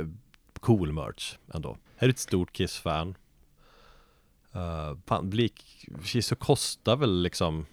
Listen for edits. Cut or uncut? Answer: cut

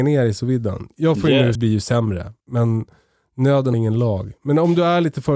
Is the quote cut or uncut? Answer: cut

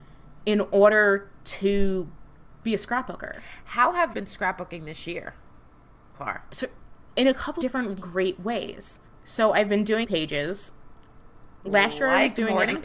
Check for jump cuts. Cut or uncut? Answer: cut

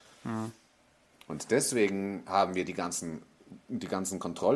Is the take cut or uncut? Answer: cut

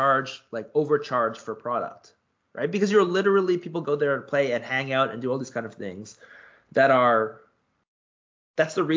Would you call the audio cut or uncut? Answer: uncut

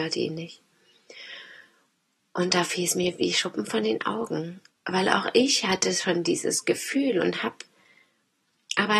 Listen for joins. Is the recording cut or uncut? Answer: cut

